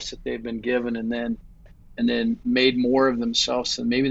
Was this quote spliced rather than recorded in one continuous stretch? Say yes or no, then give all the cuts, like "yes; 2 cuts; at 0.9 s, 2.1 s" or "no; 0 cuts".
no; 0 cuts